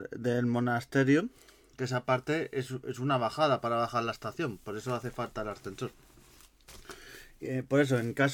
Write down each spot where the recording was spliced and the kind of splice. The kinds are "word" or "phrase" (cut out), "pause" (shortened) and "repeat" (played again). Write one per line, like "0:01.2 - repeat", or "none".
none